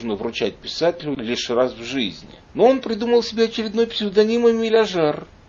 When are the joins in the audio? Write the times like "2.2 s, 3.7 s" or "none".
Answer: none